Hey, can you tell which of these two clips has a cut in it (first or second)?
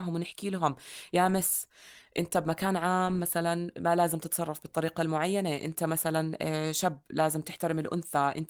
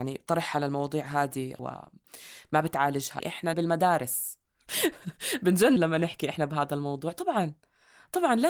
second